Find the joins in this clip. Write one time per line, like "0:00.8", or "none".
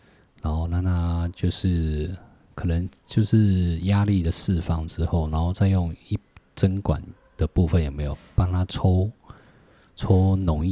none